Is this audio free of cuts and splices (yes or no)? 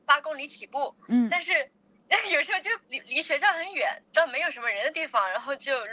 no